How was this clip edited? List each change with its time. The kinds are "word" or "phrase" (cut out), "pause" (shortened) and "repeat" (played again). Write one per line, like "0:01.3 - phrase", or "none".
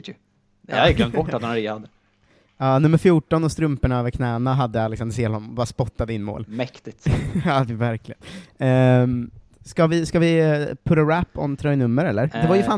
none